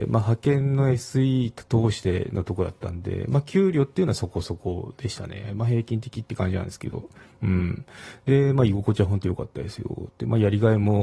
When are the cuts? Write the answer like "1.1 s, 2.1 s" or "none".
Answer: none